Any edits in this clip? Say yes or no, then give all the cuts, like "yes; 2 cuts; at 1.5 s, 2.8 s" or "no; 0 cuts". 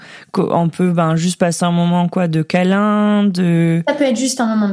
no; 0 cuts